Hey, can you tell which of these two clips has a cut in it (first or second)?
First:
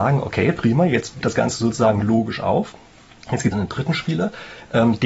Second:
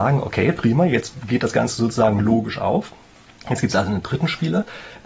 first